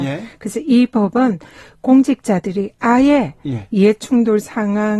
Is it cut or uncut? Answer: uncut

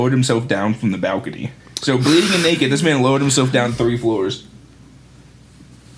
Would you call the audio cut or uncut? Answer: cut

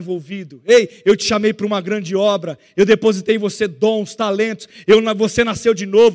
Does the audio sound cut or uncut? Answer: uncut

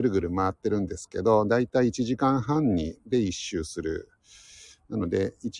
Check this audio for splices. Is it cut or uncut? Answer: uncut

